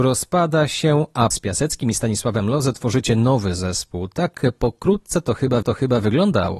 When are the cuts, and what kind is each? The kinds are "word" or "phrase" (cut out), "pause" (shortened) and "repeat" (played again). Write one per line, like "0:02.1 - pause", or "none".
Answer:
0:01.3 - word
0:05.6 - repeat